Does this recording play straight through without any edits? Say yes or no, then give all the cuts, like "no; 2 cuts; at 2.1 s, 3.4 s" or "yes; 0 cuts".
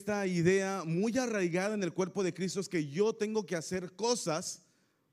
yes; 0 cuts